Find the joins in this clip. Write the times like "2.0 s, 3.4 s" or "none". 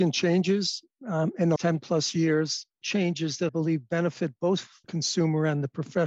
1.6 s, 2.8 s, 3.5 s, 4.8 s